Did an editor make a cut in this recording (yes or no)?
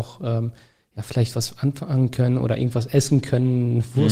no